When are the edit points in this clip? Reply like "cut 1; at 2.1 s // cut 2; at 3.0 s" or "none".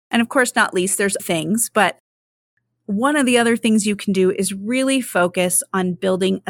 cut 1; at 1.2 s